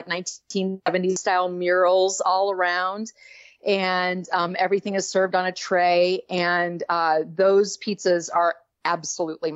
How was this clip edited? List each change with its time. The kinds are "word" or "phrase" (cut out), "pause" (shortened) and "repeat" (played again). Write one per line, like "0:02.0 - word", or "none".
none